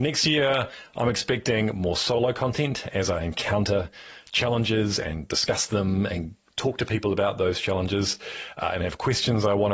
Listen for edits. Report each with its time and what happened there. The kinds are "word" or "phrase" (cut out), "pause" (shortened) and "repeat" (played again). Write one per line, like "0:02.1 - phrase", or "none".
none